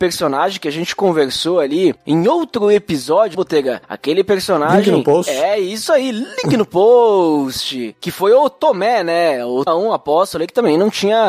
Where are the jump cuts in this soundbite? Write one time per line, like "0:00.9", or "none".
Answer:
0:03.3
0:09.7